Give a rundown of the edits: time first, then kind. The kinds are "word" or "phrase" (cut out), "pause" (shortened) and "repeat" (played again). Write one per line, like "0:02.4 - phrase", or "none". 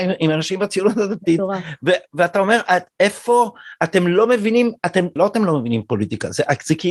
0:05.2 - word